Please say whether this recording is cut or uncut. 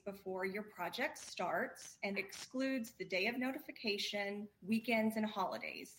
cut